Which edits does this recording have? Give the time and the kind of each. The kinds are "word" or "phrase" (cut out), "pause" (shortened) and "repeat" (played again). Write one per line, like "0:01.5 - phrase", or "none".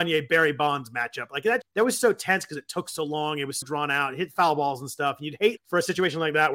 0:01.6 - word
0:03.6 - word
0:05.6 - word